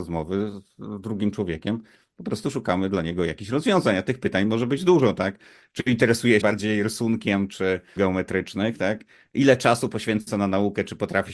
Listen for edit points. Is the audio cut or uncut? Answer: cut